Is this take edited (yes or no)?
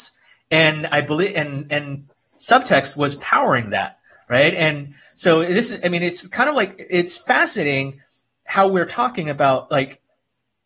no